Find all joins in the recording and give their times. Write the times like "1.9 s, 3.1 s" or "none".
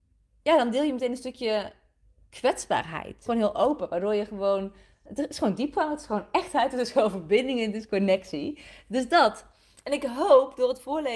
3.3 s, 5.1 s